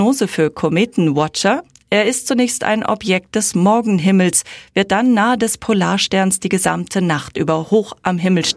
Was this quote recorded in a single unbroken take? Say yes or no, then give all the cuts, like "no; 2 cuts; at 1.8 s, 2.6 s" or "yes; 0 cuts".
yes; 0 cuts